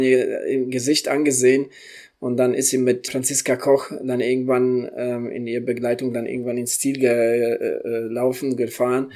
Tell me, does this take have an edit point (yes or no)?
yes